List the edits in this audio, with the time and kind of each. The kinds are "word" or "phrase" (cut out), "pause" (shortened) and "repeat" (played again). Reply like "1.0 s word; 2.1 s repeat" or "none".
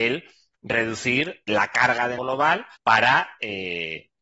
1.5 s word; 2.2 s word; 2.8 s pause